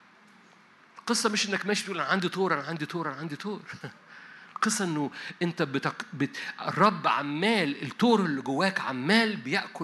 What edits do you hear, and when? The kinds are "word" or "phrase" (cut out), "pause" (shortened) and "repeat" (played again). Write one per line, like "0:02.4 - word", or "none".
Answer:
none